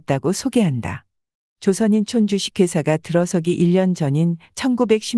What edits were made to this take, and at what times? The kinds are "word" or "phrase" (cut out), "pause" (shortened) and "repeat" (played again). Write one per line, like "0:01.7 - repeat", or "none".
none